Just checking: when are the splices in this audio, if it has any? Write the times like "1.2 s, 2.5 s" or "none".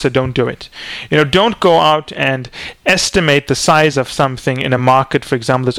none